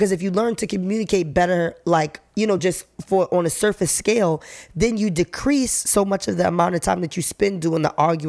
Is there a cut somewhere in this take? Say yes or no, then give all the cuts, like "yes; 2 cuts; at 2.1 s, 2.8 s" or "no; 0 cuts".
no; 0 cuts